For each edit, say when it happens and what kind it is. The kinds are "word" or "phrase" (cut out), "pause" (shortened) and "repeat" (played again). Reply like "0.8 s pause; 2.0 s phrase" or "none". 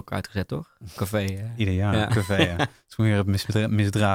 1.0 s word; 2.1 s word